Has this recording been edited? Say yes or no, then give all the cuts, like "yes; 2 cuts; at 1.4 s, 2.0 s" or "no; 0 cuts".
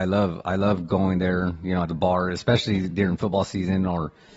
yes; 1 cut; at 1.9 s